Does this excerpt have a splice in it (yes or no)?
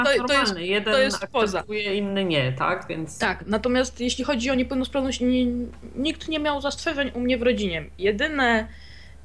no